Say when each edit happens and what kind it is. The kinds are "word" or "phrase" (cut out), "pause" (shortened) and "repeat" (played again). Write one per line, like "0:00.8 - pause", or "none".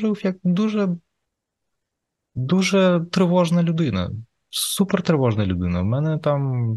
none